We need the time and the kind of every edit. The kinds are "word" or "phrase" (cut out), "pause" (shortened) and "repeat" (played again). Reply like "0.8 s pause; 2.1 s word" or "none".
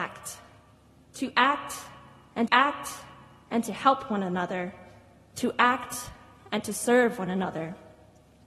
2.5 s repeat